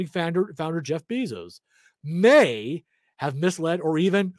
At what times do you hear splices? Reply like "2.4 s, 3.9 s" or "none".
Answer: none